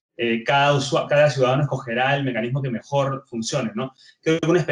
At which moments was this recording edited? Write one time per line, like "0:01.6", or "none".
none